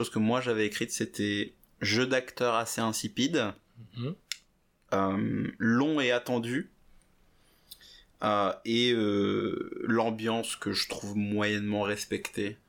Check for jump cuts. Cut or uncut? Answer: uncut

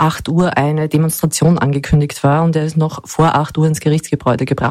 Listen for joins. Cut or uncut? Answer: uncut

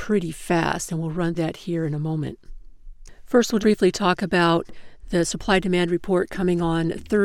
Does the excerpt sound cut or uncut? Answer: cut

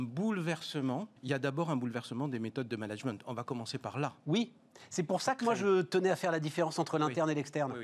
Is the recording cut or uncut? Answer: cut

